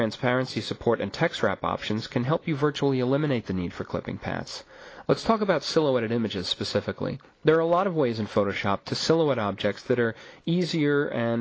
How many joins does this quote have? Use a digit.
1